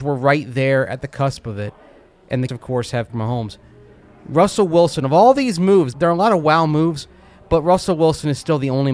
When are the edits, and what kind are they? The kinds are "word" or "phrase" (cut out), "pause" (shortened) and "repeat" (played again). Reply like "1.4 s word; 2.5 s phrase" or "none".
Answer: 2.5 s word; 3.1 s word; 5.9 s word